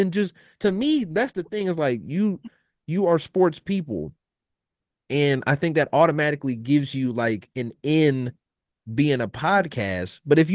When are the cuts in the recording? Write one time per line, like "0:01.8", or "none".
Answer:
0:07.5